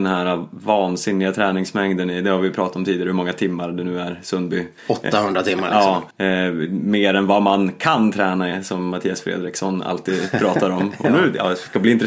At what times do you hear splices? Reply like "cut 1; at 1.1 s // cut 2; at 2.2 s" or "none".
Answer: cut 1; at 4.8 s // cut 2; at 6.1 s